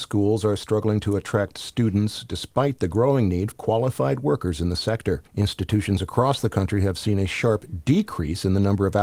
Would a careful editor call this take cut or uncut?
cut